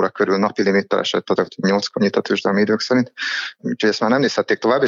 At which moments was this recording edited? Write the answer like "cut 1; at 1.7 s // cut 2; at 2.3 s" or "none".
cut 1; at 1.4 s